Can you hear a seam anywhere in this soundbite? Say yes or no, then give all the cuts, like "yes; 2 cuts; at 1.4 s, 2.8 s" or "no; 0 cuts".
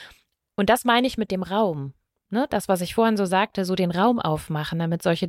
no; 0 cuts